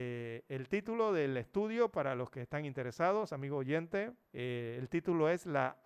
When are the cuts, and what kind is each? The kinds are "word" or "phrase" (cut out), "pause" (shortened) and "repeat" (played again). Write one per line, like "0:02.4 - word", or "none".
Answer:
0:04.2 - pause